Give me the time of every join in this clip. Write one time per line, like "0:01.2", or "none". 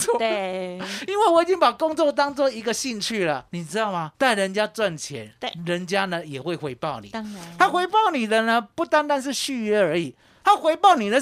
0:03.5
0:04.1